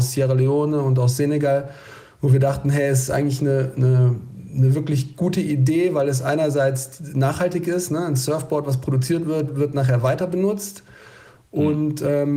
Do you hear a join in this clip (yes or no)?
no